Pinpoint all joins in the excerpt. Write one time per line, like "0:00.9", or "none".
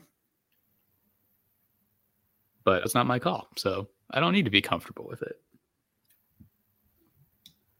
0:02.9